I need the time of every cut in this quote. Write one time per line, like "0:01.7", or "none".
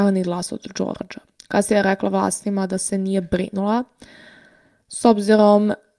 none